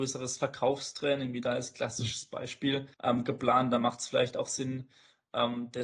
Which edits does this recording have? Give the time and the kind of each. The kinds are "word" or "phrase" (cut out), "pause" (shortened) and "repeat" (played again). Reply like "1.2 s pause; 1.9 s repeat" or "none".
2.9 s pause

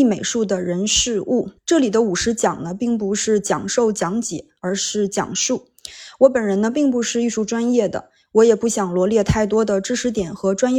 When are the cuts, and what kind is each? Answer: 1.6 s pause

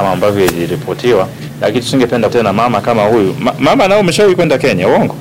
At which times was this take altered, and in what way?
2.3 s word

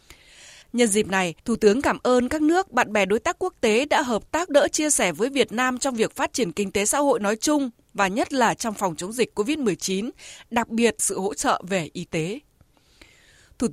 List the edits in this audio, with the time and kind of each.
1.4 s pause; 4.5 s word; 11.0 s word

